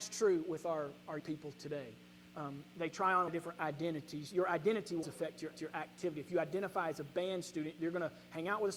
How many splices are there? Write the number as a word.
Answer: four